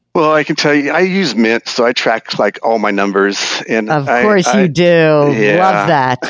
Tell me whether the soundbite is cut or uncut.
uncut